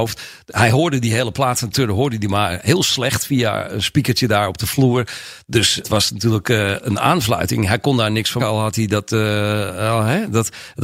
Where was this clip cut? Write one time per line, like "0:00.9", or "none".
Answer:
0:01.7
0:05.8
0:08.4